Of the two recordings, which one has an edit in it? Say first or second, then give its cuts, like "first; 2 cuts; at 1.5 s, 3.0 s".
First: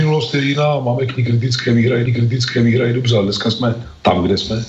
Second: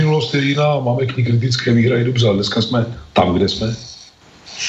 first; 1 cut; at 2.1 s